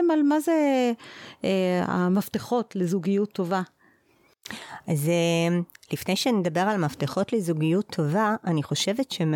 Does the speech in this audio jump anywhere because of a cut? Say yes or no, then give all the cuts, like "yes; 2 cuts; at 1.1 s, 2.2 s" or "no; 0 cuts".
no; 0 cuts